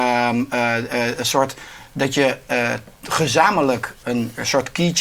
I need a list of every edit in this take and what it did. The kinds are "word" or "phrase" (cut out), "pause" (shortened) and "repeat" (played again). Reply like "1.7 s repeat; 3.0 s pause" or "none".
4.0 s word